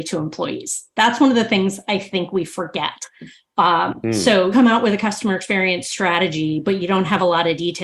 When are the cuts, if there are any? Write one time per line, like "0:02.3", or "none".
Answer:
0:04.5